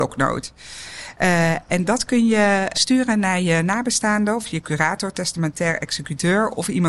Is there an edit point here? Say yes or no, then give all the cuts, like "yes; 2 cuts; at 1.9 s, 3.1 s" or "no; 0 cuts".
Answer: yes; 1 cut; at 2.7 s